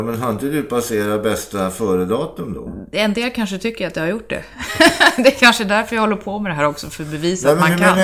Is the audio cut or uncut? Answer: uncut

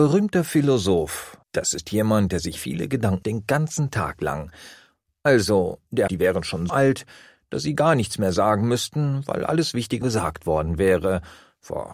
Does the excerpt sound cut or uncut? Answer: cut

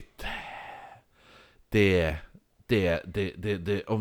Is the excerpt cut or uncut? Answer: uncut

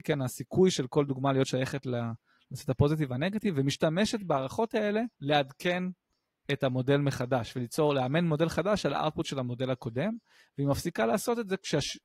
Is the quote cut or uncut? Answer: cut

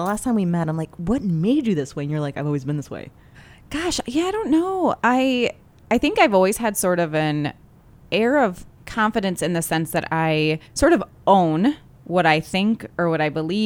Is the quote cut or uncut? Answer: cut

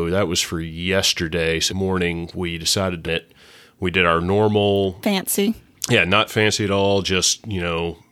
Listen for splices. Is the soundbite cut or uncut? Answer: cut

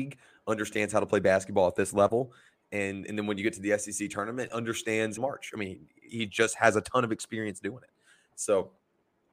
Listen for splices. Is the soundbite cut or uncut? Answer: cut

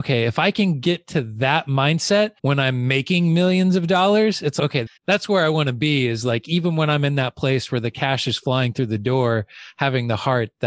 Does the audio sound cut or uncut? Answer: cut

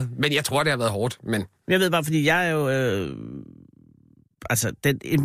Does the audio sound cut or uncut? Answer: uncut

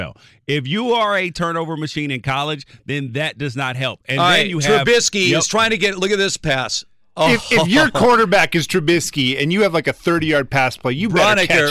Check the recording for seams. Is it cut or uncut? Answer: uncut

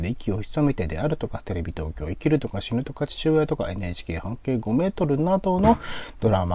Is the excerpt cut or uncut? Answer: uncut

